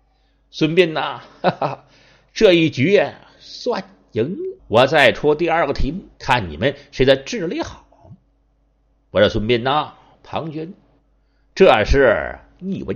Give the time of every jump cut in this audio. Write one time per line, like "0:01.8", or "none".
0:04.6
0:06.1